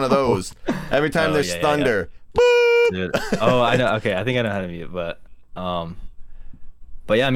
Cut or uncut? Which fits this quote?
uncut